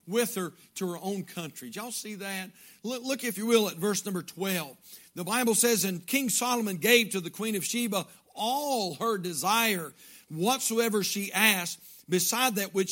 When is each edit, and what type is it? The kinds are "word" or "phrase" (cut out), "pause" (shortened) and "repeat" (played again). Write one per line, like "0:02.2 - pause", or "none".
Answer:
none